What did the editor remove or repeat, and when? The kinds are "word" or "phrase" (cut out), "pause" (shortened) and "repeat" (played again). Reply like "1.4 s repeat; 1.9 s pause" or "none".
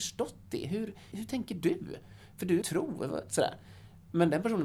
1.1 s phrase; 2.6 s phrase